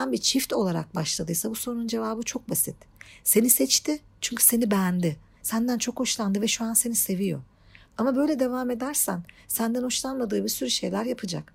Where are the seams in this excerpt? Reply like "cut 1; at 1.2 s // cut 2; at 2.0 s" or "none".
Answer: none